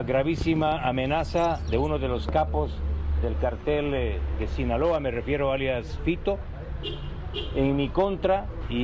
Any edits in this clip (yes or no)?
no